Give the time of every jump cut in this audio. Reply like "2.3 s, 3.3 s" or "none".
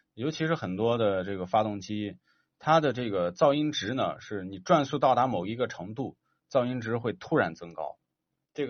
none